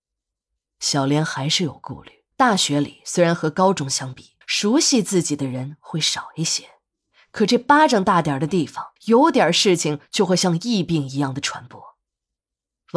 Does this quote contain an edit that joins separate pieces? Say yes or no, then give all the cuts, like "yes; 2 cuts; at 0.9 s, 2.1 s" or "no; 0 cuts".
yes; 3 cuts; at 2.3 s, 4.4 s, 9.0 s